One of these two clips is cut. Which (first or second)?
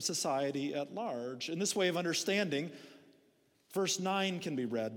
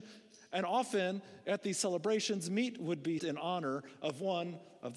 second